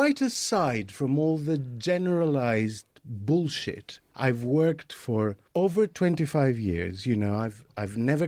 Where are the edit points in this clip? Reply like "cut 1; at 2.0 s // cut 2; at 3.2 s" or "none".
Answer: cut 1; at 4.1 s // cut 2; at 5.5 s